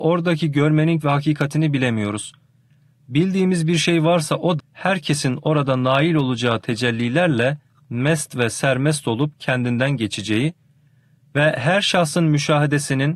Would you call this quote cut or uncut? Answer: cut